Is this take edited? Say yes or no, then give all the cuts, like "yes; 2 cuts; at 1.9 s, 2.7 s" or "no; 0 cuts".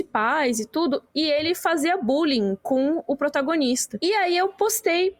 no; 0 cuts